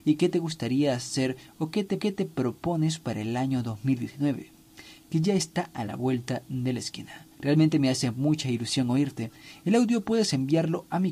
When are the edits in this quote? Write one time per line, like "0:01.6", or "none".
0:02.0
0:07.3